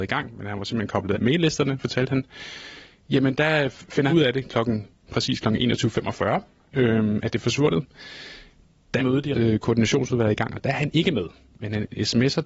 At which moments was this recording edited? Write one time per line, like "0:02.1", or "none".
0:01.1
0:04.1
0:05.0
0:09.0
0:09.3